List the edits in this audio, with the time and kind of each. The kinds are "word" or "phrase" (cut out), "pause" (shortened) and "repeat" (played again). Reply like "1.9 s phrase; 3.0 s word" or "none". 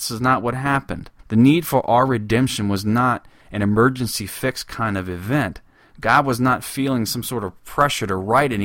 1.2 s pause